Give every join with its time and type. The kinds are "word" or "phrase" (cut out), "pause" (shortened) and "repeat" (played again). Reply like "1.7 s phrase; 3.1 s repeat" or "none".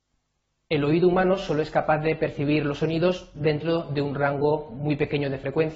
none

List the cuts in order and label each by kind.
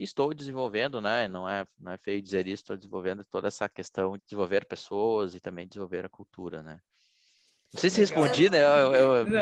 4.2 s word

